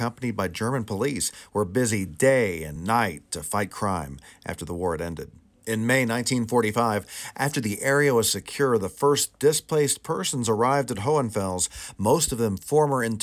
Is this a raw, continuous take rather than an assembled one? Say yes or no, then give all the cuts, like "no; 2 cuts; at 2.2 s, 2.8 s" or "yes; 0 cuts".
yes; 0 cuts